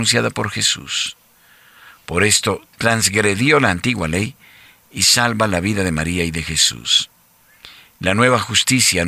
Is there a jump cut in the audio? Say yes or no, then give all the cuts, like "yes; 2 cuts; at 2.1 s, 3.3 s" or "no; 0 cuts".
no; 0 cuts